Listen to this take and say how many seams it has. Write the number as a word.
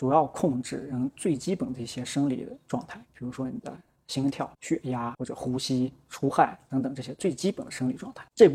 zero